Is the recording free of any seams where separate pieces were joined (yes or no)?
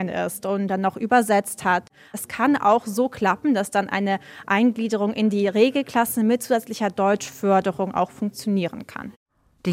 yes